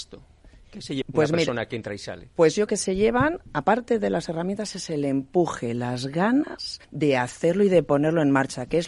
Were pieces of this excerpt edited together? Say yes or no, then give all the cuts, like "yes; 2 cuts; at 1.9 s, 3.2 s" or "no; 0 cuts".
yes; 4 cuts; at 1.0 s, 2.3 s, 2.7 s, 6.8 s